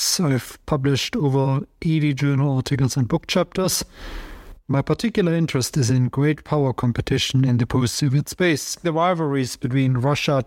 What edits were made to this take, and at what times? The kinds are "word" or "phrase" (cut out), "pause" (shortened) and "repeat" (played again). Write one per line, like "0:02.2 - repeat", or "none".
0:08.8 - word